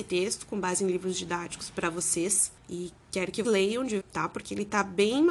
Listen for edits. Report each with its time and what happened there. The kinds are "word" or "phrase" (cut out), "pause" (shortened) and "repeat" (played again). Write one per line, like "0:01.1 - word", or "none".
0:02.6 - pause
0:03.4 - word
0:04.0 - word